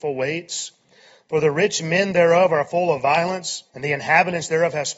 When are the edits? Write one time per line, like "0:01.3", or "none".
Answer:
0:03.7